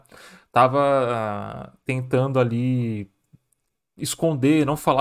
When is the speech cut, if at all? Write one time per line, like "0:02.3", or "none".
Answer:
none